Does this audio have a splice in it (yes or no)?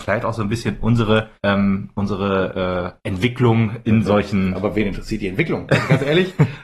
yes